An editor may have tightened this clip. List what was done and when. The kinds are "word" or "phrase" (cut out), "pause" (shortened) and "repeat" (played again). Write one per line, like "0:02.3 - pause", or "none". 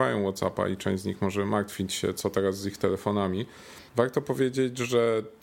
0:03.9 - pause